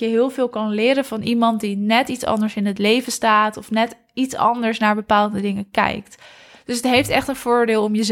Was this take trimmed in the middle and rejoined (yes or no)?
no